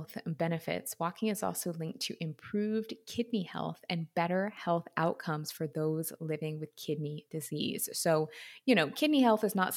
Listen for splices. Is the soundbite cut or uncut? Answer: uncut